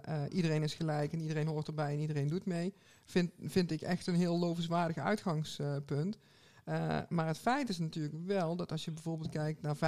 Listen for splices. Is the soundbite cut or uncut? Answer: uncut